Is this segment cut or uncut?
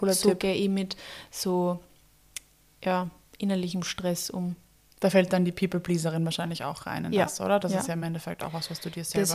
uncut